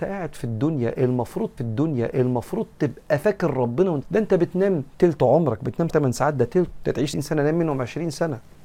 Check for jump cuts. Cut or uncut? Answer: cut